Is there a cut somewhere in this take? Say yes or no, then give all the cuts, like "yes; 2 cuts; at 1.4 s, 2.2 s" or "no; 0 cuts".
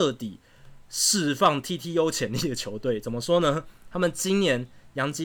no; 0 cuts